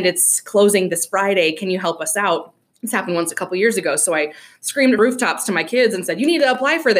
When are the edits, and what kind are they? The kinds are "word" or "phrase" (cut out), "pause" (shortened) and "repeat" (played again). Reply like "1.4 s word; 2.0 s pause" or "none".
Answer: 2.6 s pause; 5.0 s phrase